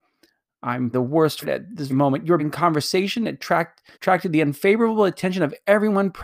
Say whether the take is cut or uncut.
cut